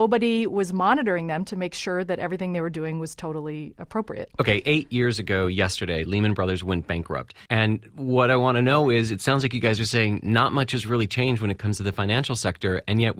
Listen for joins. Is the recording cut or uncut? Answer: cut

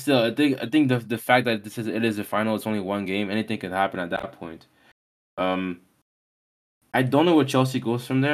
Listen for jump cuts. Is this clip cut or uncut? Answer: uncut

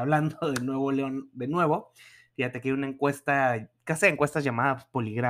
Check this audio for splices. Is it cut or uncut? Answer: uncut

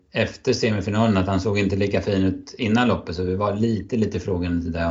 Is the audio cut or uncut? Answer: uncut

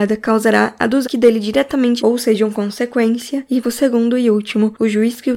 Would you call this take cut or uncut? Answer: cut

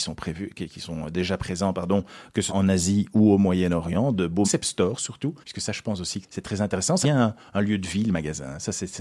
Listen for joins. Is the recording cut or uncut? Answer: cut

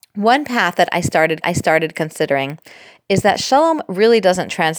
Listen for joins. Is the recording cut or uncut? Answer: cut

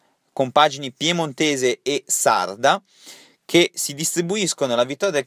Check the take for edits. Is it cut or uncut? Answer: uncut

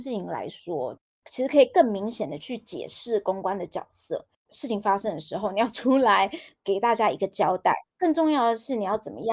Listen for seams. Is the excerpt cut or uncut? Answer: cut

